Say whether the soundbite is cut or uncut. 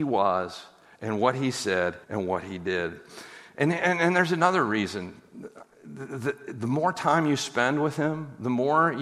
cut